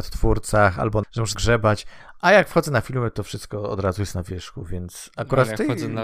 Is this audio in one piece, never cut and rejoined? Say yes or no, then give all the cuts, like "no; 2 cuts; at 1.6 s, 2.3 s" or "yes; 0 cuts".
no; 2 cuts; at 1.0 s, 1.3 s